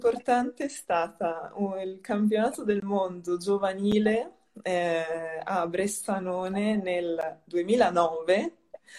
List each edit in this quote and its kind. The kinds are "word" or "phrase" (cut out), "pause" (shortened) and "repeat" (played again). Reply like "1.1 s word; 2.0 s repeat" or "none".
none